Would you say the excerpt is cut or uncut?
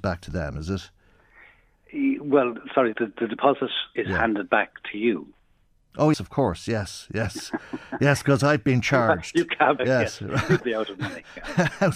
cut